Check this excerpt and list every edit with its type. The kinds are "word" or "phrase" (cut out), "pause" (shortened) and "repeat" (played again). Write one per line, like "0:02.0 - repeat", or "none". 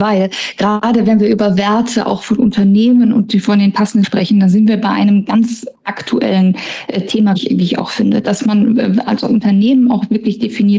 0:04.0 - word
0:07.4 - word